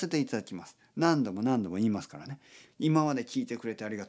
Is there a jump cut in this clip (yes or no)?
no